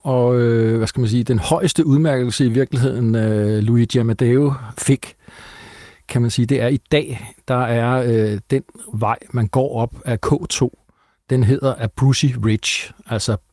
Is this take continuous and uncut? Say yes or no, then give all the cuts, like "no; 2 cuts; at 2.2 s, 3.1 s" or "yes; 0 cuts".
yes; 0 cuts